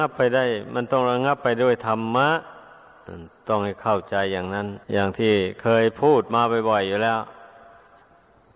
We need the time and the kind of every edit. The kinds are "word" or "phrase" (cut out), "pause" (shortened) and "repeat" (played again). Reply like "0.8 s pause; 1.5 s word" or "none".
4.8 s pause